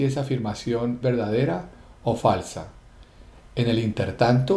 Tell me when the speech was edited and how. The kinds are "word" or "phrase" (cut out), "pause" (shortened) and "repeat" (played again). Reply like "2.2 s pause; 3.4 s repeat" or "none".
1.0 s word